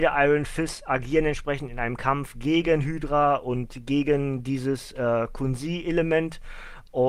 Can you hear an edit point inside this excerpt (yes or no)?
no